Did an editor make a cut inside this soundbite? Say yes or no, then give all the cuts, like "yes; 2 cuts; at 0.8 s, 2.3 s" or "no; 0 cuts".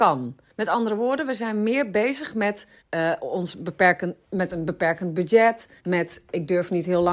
yes; 2 cuts; at 2.8 s, 5.8 s